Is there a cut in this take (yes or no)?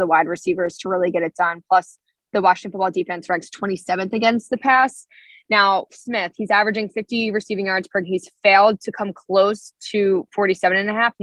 yes